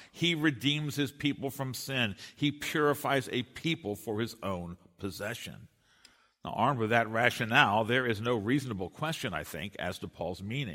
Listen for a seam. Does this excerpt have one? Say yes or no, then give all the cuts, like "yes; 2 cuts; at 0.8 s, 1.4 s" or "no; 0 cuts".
no; 0 cuts